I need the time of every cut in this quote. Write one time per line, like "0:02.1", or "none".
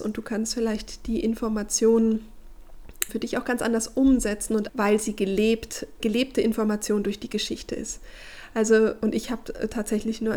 0:03.1
0:04.7
0:06.0